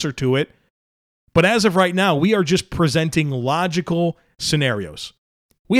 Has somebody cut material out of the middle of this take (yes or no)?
no